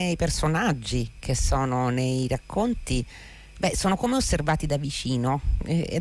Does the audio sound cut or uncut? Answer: uncut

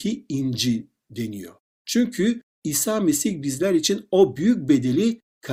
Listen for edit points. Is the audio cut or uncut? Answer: uncut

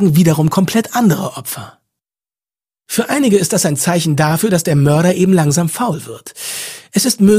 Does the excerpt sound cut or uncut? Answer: uncut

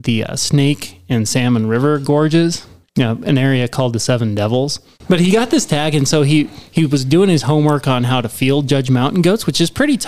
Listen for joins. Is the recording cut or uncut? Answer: uncut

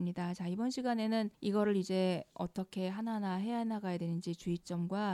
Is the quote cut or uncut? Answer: cut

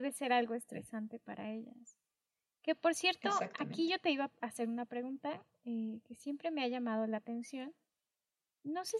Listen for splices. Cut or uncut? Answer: uncut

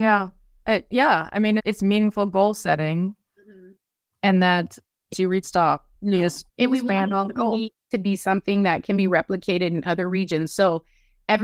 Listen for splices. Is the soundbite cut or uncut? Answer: cut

